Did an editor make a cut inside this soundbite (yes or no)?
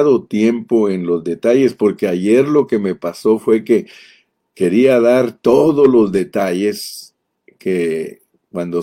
no